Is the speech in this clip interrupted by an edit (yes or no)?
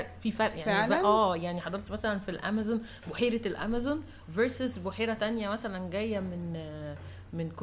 no